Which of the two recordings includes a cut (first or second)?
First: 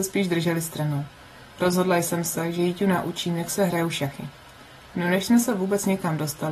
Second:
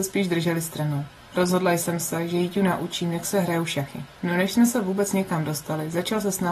second